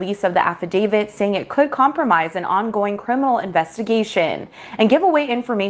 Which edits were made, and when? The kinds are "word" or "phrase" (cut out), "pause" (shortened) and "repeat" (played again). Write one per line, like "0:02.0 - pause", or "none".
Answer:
none